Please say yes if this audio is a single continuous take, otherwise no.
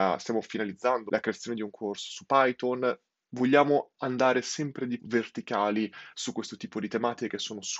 no